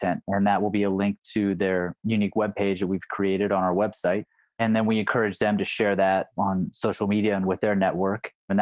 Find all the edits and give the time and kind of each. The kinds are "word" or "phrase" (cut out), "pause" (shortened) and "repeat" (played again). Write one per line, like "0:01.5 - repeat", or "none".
none